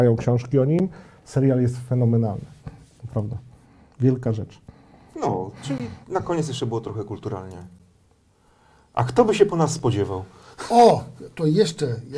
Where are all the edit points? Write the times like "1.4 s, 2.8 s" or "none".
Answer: none